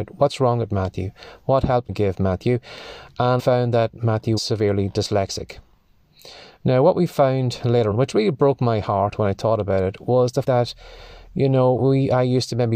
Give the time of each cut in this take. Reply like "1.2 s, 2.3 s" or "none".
1.9 s, 3.4 s, 4.4 s, 7.9 s, 10.4 s, 11.8 s

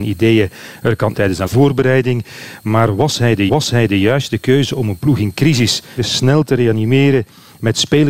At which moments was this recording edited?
1.1 s, 1.5 s, 3.5 s, 6.0 s

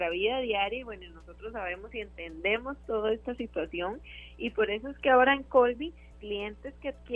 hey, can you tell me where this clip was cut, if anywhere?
6.1 s

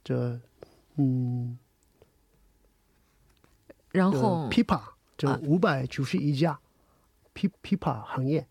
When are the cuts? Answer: 5.1 s, 7.5 s

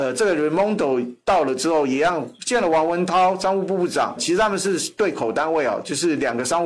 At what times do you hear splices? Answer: 4.2 s

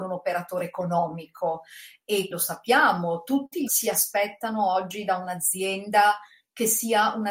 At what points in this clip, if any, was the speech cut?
2.3 s, 3.7 s

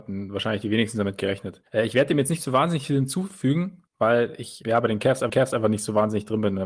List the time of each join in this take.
1.7 s, 3.9 s, 4.6 s, 5.3 s

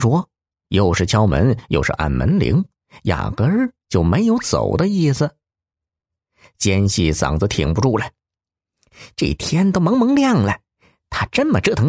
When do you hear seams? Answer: none

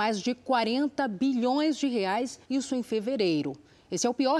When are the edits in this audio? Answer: 2.4 s

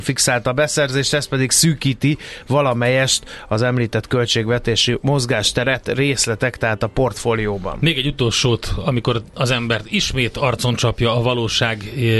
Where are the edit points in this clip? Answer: none

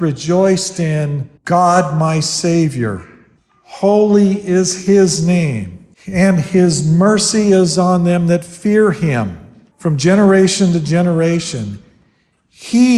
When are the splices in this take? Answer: 1.4 s, 3.4 s, 5.9 s, 9.7 s

